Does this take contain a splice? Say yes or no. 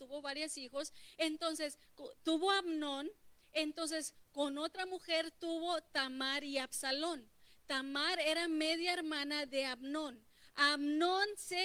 no